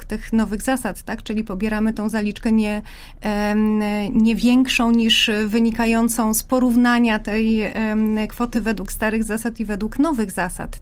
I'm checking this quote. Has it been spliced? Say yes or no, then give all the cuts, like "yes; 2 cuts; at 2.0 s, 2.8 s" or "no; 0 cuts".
no; 0 cuts